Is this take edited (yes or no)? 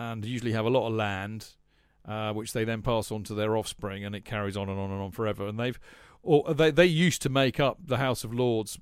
no